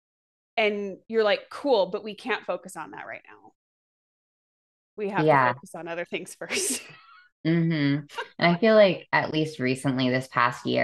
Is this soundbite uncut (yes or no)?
yes